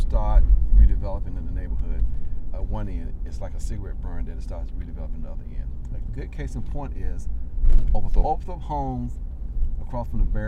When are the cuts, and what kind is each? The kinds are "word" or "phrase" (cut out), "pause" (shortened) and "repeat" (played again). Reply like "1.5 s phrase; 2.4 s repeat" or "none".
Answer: 2.5 s word; 8.2 s word